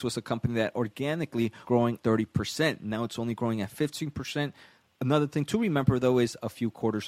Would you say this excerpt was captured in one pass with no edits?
no; 2 cuts; at 1.6 s, 2.0 s

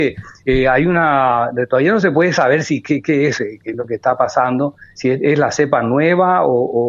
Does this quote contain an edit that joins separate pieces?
no; 0 cuts

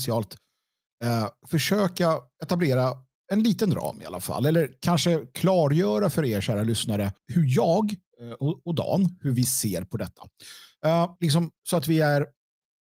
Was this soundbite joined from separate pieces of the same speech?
yes; 2 cuts; at 7.2 s, 11.2 s

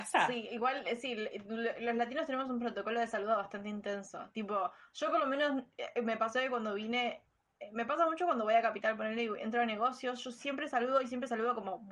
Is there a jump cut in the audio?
no; 0 cuts

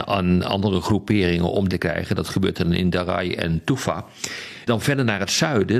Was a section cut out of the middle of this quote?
yes; 2 cuts; at 1.7 s, 4.7 s

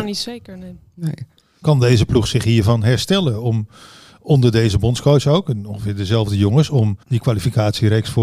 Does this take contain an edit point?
yes; 1 cut; at 7.0 s

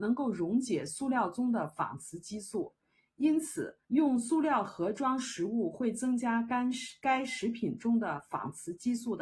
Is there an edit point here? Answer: yes; 1 cut; at 3.8 s

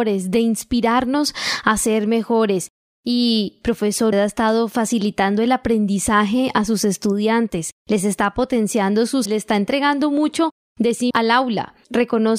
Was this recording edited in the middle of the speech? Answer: yes; 3 cuts; at 4.1 s, 9.3 s, 11.1 s

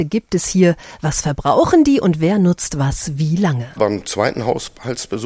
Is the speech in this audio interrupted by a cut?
no; 0 cuts

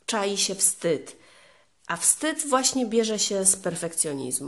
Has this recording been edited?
no; 0 cuts

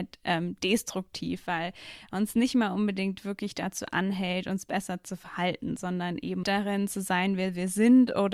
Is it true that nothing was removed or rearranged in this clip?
no; 1 cut; at 6.4 s

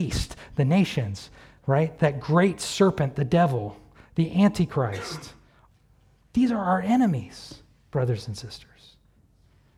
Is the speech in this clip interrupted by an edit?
no; 0 cuts

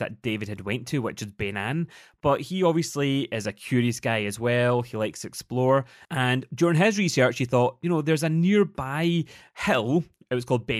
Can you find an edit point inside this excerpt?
no; 0 cuts

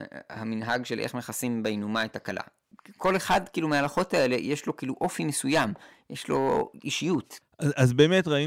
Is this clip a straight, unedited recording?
yes; 0 cuts

